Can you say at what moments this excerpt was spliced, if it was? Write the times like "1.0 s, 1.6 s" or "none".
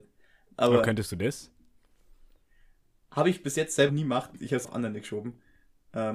3.9 s, 4.6 s